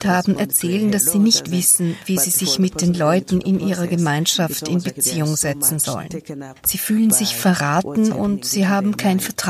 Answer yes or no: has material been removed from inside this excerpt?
no